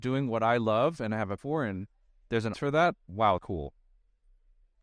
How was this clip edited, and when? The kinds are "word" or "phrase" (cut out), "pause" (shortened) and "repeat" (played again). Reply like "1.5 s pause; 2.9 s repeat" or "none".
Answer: 1.4 s word; 2.5 s word; 3.4 s word